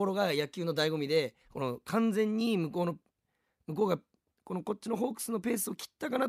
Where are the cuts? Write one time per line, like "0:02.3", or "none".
0:01.4